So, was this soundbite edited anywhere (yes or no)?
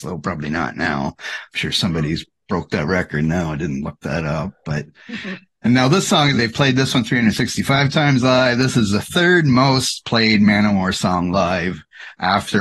yes